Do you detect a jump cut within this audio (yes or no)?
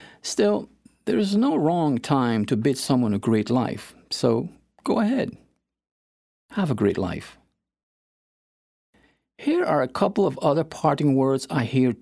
no